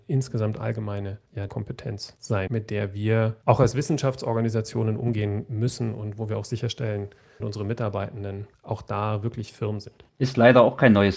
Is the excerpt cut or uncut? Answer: cut